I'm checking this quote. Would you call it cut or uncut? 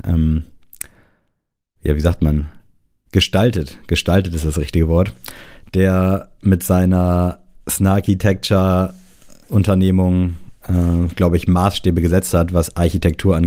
uncut